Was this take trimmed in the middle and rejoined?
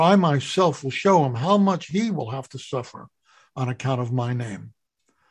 no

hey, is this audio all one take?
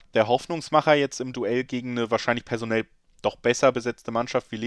yes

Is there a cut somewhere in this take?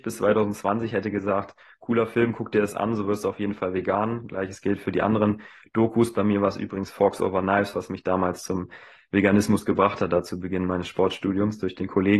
no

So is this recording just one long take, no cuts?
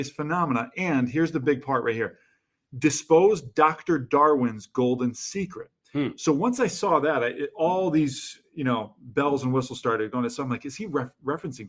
yes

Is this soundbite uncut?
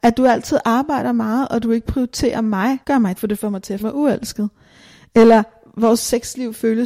no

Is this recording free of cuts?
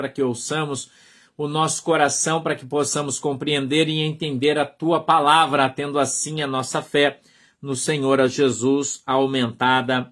yes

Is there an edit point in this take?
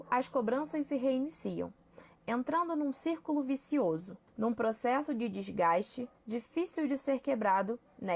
yes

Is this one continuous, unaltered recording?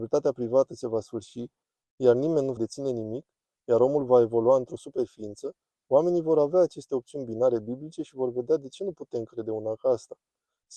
no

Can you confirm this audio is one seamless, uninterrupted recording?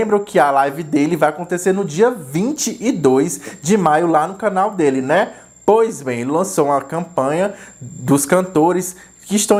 yes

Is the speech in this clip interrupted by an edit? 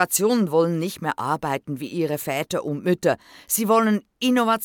no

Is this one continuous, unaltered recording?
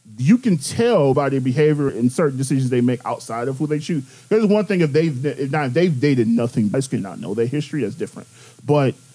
no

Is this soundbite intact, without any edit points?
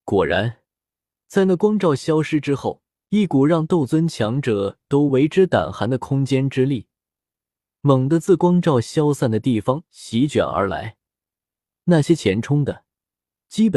no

